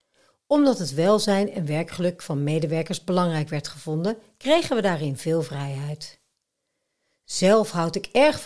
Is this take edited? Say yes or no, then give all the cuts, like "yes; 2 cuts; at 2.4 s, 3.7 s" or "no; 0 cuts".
no; 0 cuts